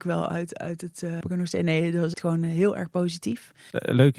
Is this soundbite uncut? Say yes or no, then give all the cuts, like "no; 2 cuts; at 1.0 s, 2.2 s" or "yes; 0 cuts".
no; 2 cuts; at 1.2 s, 2.1 s